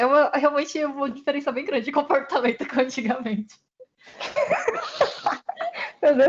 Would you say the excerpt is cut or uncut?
uncut